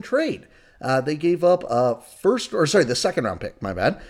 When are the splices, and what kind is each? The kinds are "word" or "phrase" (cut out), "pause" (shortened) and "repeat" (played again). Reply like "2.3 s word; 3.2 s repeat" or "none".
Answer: none

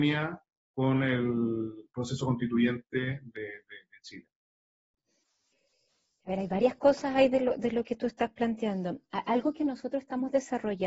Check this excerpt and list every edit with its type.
none

